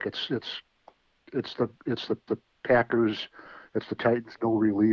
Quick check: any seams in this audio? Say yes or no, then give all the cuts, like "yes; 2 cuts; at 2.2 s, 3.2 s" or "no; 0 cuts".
yes; 2 cuts; at 2.3 s, 4.0 s